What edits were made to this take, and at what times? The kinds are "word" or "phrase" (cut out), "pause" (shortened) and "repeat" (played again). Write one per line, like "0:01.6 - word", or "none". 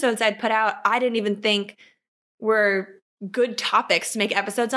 none